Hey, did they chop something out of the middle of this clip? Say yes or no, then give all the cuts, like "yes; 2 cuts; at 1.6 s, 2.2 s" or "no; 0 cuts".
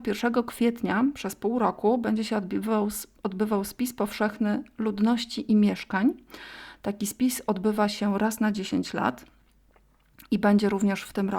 no; 0 cuts